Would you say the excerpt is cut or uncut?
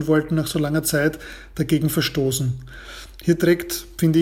uncut